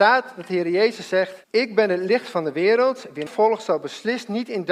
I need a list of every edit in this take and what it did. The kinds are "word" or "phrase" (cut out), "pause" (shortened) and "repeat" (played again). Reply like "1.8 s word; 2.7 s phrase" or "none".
1.4 s pause; 3.3 s word

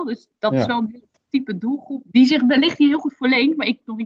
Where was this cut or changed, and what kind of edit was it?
none

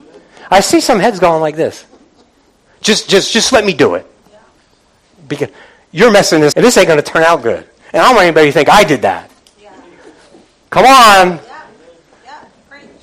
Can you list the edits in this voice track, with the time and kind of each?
6.5 s word

